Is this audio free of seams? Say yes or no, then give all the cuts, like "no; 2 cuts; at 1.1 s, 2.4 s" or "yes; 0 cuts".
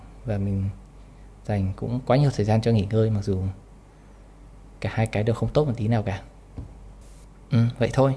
yes; 0 cuts